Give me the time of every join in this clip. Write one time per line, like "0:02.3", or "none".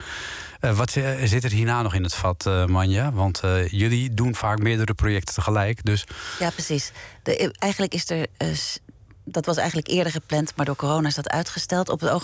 none